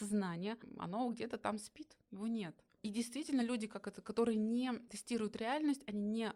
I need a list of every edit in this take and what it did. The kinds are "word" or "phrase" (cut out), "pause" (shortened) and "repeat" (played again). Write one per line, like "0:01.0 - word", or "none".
none